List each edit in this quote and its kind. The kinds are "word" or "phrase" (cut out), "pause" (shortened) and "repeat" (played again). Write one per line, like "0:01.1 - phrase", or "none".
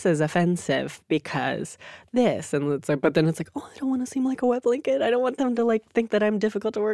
none